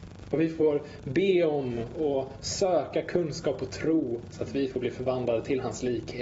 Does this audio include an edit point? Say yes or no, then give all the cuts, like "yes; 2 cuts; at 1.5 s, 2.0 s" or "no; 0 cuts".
no; 0 cuts